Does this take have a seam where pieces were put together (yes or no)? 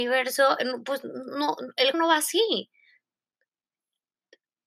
yes